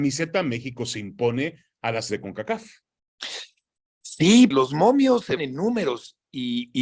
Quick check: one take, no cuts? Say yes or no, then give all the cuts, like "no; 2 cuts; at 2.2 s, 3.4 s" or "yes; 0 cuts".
no; 3 cuts; at 2.1 s, 4.5 s, 5.4 s